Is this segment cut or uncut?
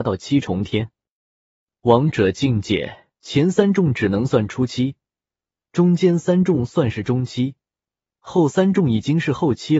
cut